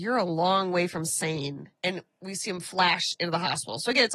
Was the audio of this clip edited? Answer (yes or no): yes